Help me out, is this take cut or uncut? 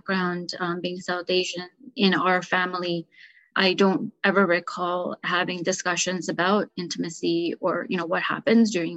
uncut